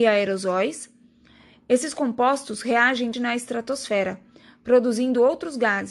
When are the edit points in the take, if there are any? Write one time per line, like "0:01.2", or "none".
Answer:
0:03.1